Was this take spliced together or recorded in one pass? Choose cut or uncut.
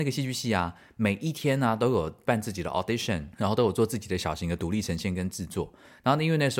uncut